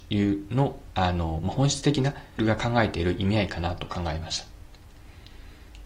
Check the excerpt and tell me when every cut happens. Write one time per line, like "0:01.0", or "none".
0:02.4